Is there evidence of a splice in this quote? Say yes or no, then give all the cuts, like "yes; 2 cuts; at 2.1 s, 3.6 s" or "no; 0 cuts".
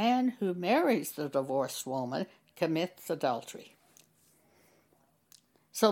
no; 0 cuts